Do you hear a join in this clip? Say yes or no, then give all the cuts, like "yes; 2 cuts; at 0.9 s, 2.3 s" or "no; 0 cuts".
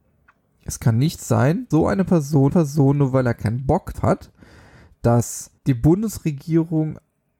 yes; 4 cuts; at 1.7 s, 2.5 s, 3.9 s, 5.6 s